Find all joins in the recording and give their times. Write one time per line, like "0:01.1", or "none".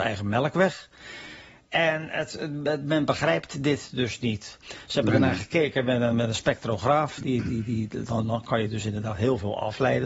none